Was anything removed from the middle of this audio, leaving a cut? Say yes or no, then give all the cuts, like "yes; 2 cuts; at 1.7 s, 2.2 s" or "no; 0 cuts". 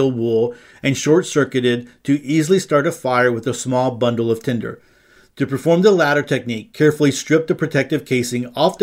no; 0 cuts